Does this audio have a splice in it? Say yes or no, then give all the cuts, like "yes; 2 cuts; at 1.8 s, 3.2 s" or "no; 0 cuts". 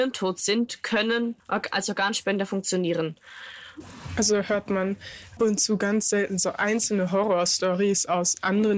yes; 2 cuts; at 1.4 s, 5.4 s